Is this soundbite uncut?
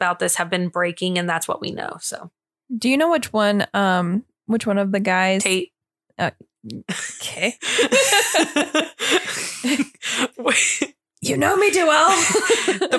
yes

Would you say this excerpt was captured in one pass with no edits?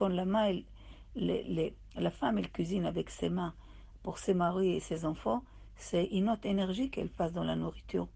yes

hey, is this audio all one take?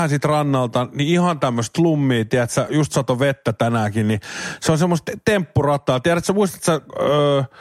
yes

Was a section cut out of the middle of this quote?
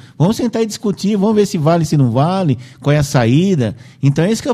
no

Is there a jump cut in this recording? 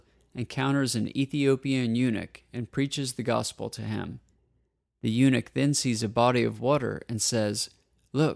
no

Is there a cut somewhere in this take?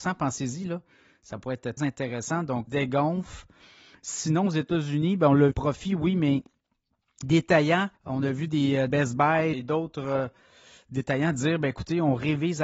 yes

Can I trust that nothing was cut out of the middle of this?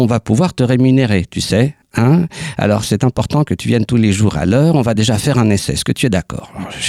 yes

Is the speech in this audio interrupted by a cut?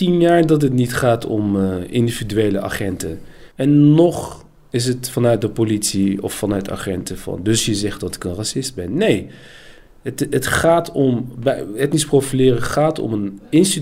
yes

